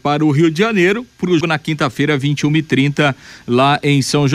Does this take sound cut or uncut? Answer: cut